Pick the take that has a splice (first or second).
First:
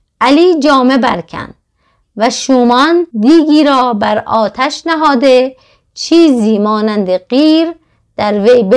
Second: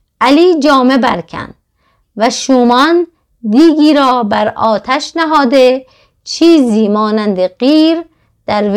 first